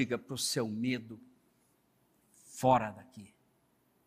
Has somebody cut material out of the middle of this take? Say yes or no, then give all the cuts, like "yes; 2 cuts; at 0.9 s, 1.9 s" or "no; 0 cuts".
no; 0 cuts